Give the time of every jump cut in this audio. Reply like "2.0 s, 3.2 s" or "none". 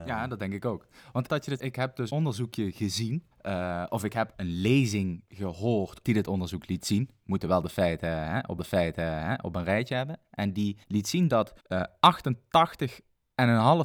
1.3 s, 1.6 s, 2.1 s, 3.3 s, 4.3 s, 6.0 s, 8.6 s, 10.8 s, 11.6 s